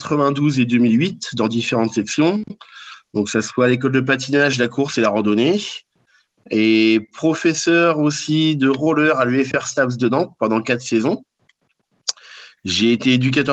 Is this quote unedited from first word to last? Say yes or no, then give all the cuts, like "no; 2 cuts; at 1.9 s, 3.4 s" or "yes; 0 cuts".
yes; 0 cuts